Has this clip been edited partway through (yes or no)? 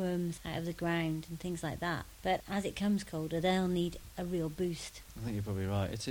no